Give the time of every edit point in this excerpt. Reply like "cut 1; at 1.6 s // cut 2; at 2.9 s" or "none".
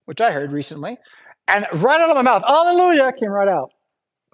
none